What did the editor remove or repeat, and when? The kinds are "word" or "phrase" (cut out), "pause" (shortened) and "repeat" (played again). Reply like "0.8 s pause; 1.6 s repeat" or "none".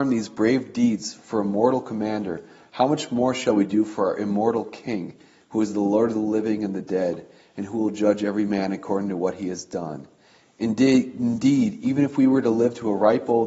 none